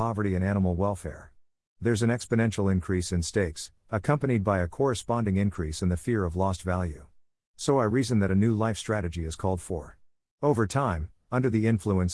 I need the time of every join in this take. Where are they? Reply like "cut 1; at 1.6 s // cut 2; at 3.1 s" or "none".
none